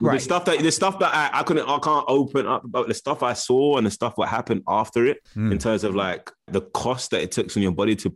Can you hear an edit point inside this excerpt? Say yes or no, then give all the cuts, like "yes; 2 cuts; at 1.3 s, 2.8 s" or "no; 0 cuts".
yes; 2 cuts; at 5.3 s, 6.5 s